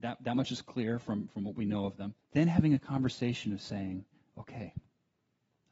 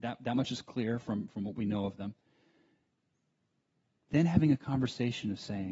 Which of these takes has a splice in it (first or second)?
first